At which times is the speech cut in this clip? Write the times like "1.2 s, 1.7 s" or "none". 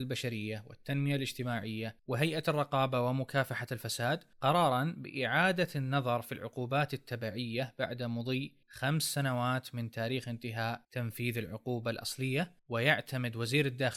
2.0 s, 4.3 s, 8.6 s, 10.8 s, 12.6 s